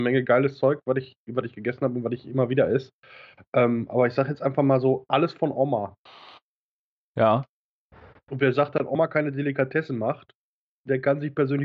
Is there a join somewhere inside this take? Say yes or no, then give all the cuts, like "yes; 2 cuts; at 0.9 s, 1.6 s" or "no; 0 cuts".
no; 0 cuts